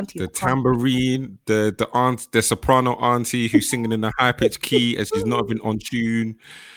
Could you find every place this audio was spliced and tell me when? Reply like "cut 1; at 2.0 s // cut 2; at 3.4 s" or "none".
none